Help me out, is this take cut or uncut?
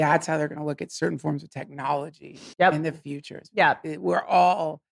cut